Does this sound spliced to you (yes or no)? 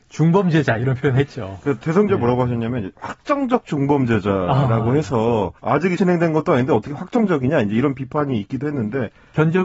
yes